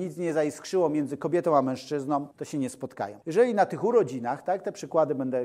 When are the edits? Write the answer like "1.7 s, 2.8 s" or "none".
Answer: 2.3 s, 3.2 s